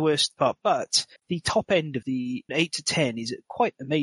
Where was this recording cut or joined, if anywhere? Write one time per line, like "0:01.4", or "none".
0:01.2
0:02.0
0:02.5